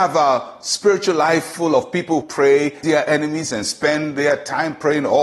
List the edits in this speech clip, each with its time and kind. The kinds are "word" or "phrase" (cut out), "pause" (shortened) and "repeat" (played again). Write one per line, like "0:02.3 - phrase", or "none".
0:02.2 - word
0:02.8 - word